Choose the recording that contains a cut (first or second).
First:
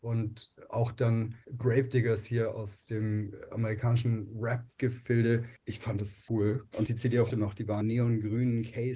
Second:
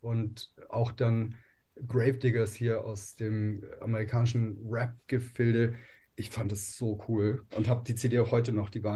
first